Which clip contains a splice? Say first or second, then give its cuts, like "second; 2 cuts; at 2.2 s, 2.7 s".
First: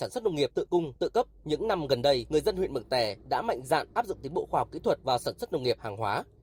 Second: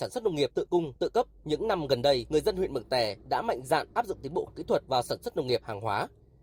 second; 1 cut; at 4.5 s